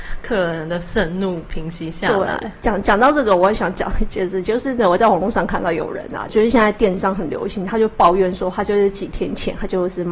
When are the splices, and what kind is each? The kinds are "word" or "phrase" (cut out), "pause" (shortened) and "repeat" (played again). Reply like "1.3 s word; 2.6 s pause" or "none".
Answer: 6.3 s phrase